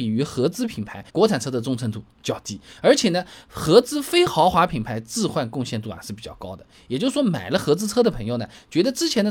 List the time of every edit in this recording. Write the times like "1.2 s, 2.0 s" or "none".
1.1 s